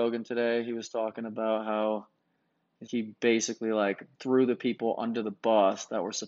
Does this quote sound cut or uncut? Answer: cut